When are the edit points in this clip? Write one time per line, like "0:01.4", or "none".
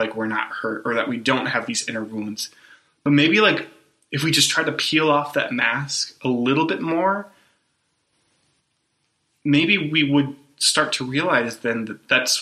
none